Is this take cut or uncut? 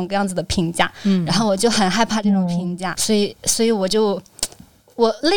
cut